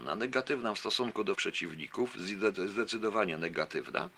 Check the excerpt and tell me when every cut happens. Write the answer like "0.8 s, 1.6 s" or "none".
1.3 s